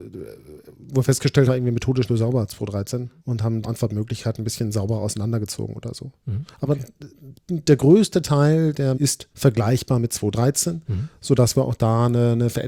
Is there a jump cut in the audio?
yes; 6 cuts; at 1.5 s, 2.1 s, 3.2 s, 3.6 s, 8.9 s, 9.3 s

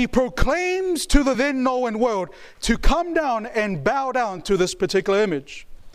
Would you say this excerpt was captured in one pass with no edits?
yes; 0 cuts

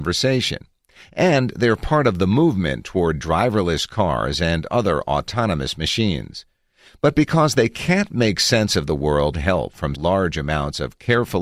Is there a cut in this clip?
yes; 2 cuts; at 9.3 s, 9.9 s

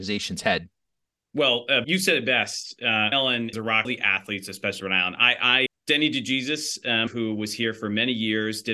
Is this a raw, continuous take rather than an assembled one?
no; 7 cuts; at 1.8 s, 3.1 s, 3.5 s, 3.8 s, 4.8 s, 5.7 s, 7.1 s

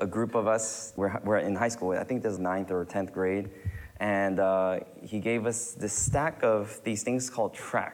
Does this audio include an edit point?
yes; 2 cuts; at 1.0 s, 2.4 s

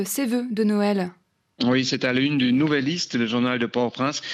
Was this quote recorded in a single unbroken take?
yes; 0 cuts

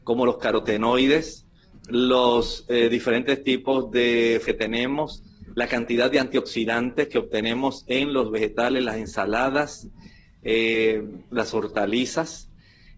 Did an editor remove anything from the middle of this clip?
yes; 1 cut; at 4.5 s

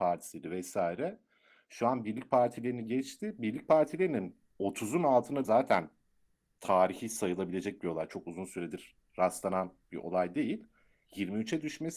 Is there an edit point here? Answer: yes; 1 cut; at 5.4 s

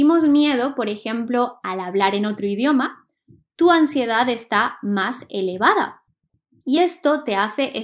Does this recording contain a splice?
no; 0 cuts

